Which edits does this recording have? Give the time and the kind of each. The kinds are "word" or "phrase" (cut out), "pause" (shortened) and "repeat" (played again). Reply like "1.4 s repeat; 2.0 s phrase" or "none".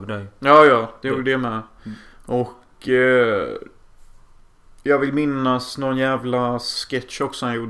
none